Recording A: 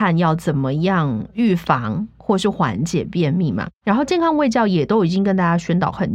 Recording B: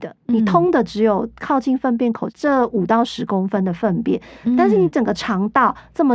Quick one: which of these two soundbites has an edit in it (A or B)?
A